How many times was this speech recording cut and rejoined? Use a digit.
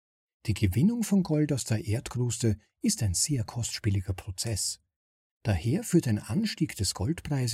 0